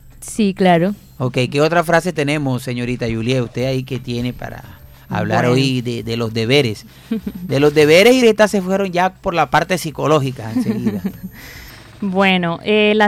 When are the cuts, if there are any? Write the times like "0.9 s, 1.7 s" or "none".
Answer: 8.2 s